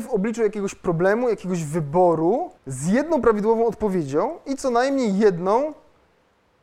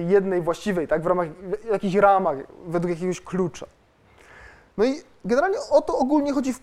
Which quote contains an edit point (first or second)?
first